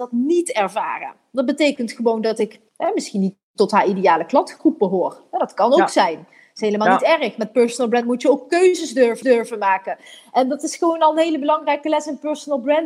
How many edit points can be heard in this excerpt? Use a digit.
2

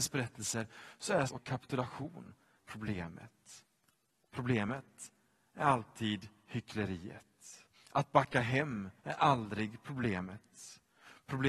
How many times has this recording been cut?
4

